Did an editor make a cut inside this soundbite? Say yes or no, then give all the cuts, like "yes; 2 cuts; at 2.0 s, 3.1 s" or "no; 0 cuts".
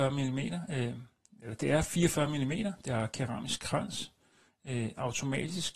no; 0 cuts